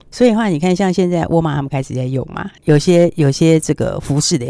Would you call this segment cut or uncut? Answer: cut